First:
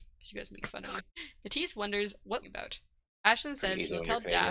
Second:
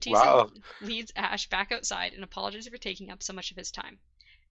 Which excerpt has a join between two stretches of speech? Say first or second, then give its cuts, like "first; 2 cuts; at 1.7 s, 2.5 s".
first; 2 cuts; at 1.1 s, 2.4 s